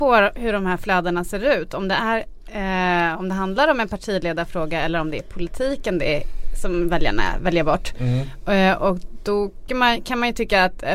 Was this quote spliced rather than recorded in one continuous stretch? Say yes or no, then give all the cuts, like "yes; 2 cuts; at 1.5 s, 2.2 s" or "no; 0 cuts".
yes; 1 cut; at 9.7 s